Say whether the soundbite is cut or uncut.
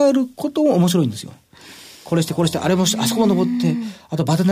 uncut